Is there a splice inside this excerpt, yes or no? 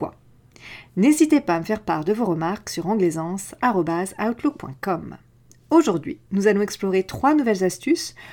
no